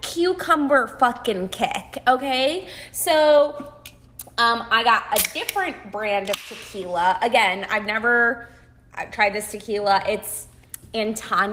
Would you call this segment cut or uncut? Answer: uncut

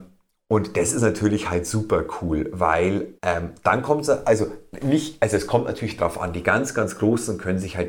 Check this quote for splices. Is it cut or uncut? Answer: cut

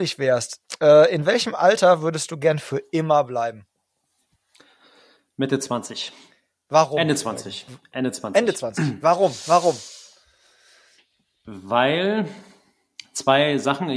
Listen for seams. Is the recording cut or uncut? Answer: cut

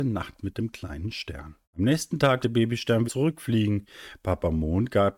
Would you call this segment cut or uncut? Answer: cut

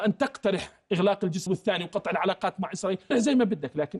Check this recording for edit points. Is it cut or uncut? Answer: cut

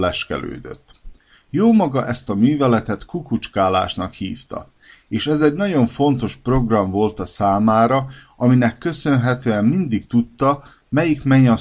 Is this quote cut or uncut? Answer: uncut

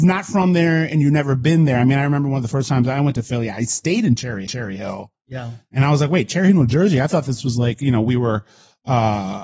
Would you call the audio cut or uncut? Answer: cut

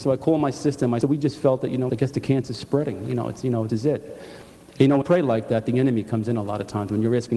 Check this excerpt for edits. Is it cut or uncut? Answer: cut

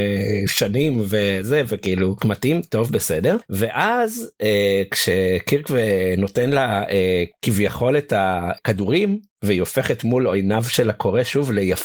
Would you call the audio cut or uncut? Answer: cut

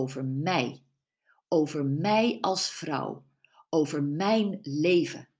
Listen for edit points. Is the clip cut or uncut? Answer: uncut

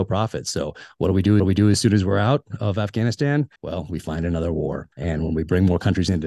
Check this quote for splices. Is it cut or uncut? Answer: cut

